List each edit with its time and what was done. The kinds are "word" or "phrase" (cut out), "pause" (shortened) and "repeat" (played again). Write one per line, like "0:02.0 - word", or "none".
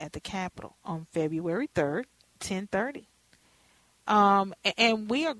0:02.3 - word